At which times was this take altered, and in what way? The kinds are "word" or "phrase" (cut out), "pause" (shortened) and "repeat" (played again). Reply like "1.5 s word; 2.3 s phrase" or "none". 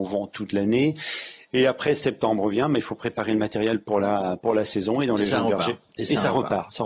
none